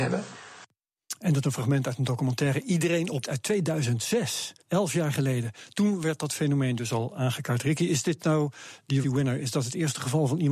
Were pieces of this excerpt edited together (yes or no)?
yes